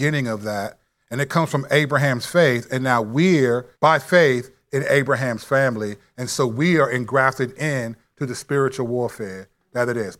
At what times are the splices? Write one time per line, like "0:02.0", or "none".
0:03.7